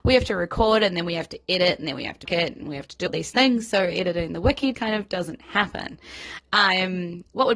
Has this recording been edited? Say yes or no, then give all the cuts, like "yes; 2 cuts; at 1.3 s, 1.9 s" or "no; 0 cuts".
yes; 3 cuts; at 2.3 s, 3.1 s, 4.7 s